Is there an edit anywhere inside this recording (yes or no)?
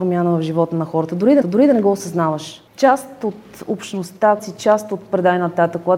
yes